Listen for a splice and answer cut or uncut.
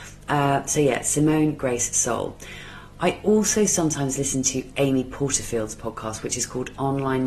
uncut